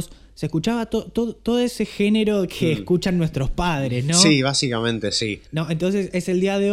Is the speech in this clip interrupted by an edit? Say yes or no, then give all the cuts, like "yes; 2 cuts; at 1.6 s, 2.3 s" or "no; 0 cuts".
yes; 1 cut; at 5.5 s